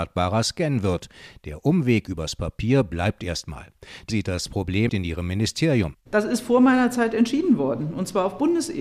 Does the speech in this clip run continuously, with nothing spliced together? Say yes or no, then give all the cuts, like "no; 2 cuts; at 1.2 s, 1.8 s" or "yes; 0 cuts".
no; 2 cuts; at 4.1 s, 4.9 s